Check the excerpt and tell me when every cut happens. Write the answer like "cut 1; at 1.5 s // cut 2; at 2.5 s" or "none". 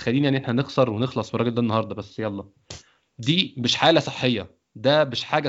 none

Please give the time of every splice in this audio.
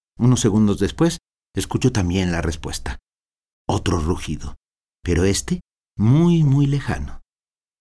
none

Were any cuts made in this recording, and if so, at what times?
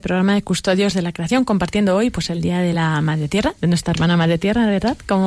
none

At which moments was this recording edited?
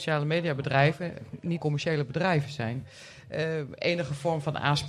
cut 1; at 1.6 s

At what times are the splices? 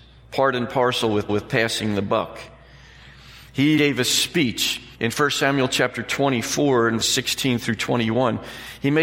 cut 1; at 1.3 s // cut 2; at 3.8 s // cut 3; at 4.9 s // cut 4; at 7.0 s

